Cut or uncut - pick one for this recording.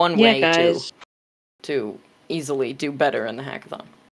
uncut